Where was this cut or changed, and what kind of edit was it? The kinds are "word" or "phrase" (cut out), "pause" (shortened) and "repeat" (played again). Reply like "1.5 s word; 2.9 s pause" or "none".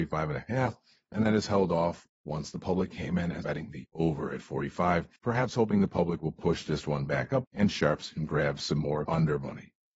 3.4 s word; 5.2 s pause; 7.4 s word; 9.0 s word